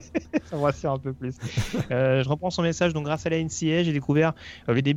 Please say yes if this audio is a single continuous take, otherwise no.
yes